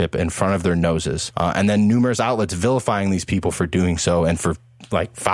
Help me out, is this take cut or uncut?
uncut